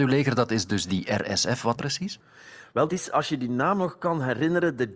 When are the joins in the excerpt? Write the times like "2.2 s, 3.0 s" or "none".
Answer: 1.8 s, 2.9 s